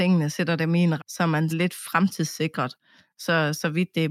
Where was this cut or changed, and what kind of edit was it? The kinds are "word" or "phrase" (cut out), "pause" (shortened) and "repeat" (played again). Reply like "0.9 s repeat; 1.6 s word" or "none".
1.0 s word; 1.5 s word